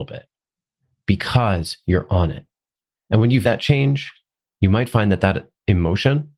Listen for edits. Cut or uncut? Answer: cut